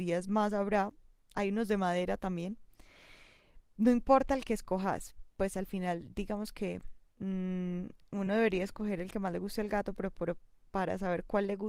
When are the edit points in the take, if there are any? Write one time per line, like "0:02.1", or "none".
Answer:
none